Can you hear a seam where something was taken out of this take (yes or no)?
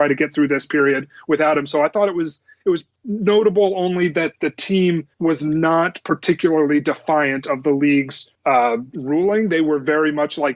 yes